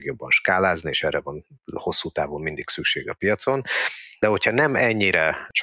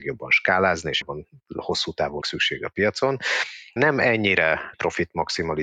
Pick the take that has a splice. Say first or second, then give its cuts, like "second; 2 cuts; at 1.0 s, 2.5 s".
second; 4 cuts; at 1.0 s, 2.2 s, 3.8 s, 4.7 s